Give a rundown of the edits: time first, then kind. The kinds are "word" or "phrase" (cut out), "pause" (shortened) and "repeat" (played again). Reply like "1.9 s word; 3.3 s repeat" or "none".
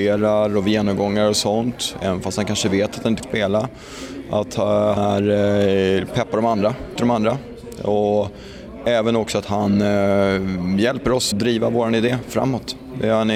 3.2 s word; 5.0 s word; 7.0 s word; 11.3 s word